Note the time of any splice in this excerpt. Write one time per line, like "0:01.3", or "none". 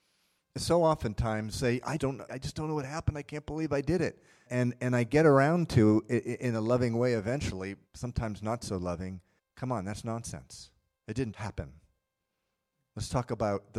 0:01.5
0:02.0
0:02.3
0:04.5
0:07.9
0:09.4
0:10.9
0:11.3